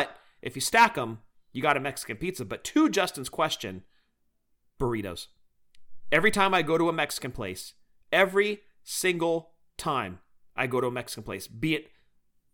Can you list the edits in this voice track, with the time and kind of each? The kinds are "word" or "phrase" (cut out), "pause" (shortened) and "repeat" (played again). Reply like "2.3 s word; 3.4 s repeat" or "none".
none